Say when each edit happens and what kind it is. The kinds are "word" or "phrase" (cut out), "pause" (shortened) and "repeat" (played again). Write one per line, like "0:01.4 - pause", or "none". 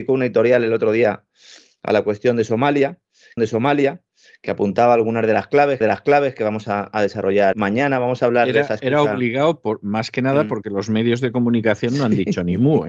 0:03.4 - repeat
0:05.8 - repeat
0:07.5 - word